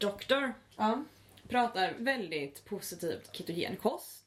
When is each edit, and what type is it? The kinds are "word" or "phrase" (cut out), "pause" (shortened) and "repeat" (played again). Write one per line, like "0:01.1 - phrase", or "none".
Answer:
0:02.0 - word
0:03.3 - word